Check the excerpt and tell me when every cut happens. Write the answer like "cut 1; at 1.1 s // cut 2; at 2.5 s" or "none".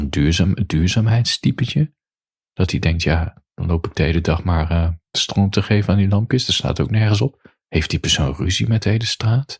cut 1; at 7.6 s

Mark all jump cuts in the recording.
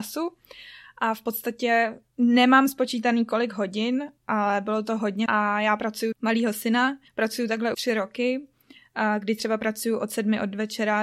cut 1; at 2.1 s // cut 2; at 4.2 s // cut 3; at 5.3 s // cut 4; at 6.1 s // cut 5; at 7.1 s // cut 6; at 7.7 s

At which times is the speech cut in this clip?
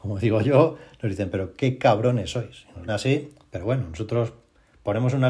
cut 1; at 2.9 s

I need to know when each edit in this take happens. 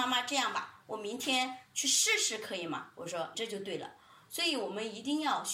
cut 1; at 3.3 s

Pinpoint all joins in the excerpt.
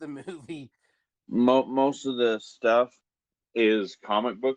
none

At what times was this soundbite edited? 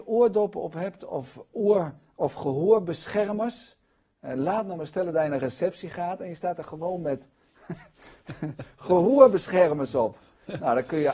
none

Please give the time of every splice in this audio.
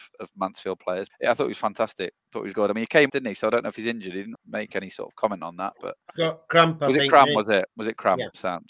cut 1; at 1.1 s // cut 2; at 2.5 s // cut 3; at 3.1 s // cut 4; at 4.3 s // cut 5; at 6.2 s

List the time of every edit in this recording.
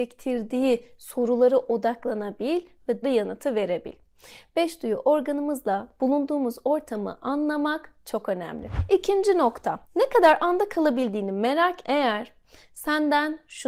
cut 1; at 3.0 s // cut 2; at 9.8 s // cut 3; at 11.8 s

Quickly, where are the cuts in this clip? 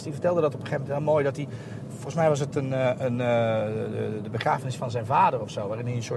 none

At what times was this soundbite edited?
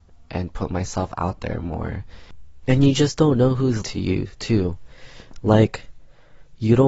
cut 1; at 3.8 s

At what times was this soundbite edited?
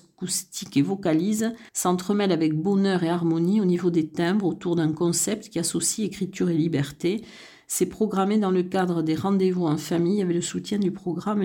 cut 1; at 1.7 s

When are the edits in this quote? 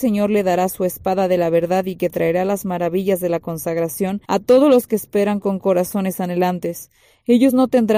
cut 1; at 4.2 s

